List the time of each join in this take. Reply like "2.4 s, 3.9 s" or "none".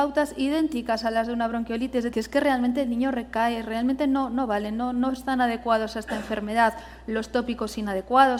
2.1 s